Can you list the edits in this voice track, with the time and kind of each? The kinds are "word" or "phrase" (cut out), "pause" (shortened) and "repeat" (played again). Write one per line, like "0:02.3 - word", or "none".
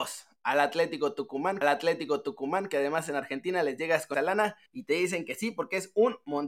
0:01.6 - repeat
0:04.1 - word
0:04.7 - pause